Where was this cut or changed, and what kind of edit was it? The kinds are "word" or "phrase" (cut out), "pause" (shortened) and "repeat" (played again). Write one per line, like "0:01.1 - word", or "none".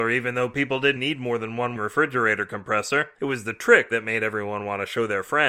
0:01.0 - word
0:01.8 - word
0:03.9 - word